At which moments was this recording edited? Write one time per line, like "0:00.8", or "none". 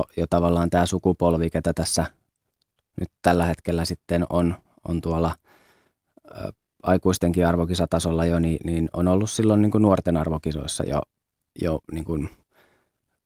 none